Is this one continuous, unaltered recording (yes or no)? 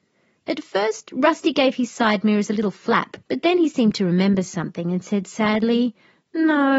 no